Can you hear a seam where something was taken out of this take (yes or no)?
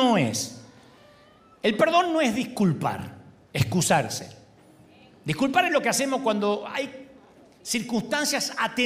no